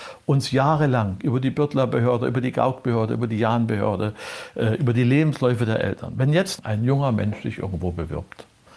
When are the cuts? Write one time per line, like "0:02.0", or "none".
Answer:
none

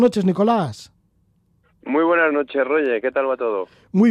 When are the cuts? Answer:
none

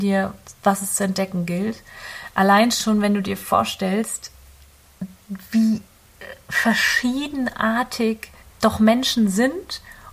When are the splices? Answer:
0:08.4

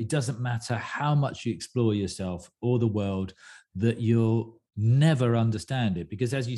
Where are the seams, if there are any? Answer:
0:04.7

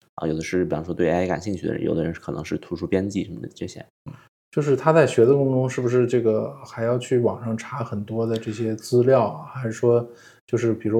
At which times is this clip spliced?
none

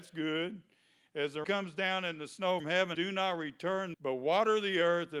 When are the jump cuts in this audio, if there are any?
0:01.4
0:02.6
0:02.9
0:03.9

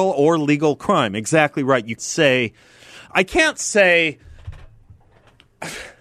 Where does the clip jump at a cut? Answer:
0:02.0

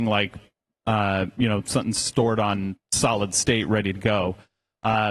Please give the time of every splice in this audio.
none

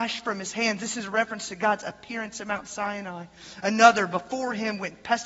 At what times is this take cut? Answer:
none

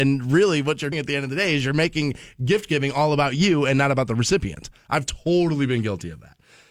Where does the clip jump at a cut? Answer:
0:00.9

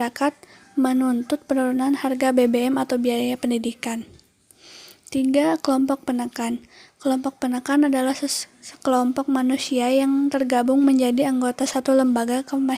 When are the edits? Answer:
none

